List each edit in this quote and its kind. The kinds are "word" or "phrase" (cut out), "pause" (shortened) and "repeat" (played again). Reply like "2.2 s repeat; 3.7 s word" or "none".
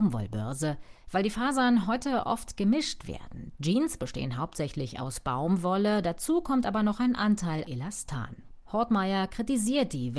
7.7 s word